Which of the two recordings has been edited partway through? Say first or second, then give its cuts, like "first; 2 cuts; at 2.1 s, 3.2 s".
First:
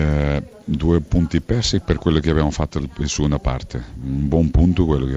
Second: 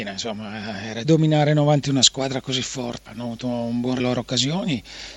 second; 4 cuts; at 1.0 s, 1.8 s, 3.1 s, 4.0 s